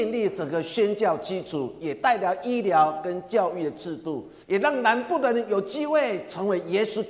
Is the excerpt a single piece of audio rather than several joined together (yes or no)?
no